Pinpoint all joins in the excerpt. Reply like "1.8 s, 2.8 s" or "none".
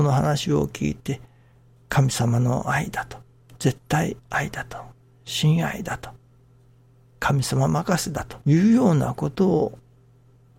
4.2 s, 8.4 s